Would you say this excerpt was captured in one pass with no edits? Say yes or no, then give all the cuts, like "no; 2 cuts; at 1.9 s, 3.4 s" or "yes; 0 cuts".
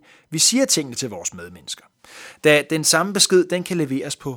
yes; 0 cuts